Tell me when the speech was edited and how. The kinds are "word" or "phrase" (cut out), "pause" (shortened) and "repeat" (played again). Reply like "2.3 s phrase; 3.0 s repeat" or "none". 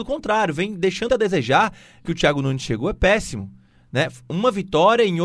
1.1 s word; 2.1 s phrase